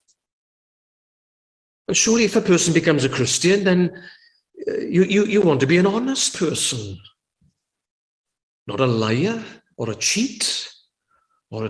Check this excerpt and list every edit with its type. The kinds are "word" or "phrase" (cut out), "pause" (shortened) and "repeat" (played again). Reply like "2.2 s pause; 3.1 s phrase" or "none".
none